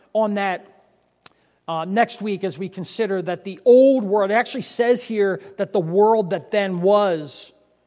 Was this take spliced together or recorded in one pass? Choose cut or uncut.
uncut